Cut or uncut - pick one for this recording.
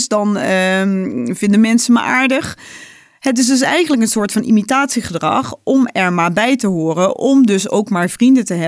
uncut